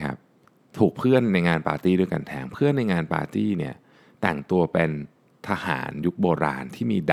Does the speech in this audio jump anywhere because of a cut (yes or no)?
no